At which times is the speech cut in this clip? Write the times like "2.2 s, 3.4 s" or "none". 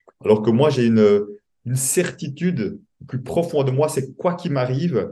none